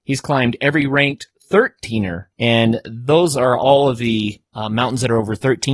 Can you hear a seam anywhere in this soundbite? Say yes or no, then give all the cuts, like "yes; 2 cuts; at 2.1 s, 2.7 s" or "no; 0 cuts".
yes; 1 cut; at 2.3 s